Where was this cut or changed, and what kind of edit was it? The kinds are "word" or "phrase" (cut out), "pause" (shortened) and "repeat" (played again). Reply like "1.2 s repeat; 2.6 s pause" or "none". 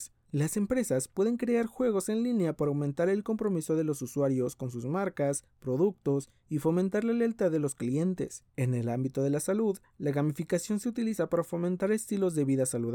8.5 s pause